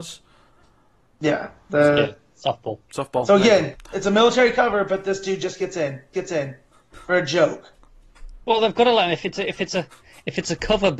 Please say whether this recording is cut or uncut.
cut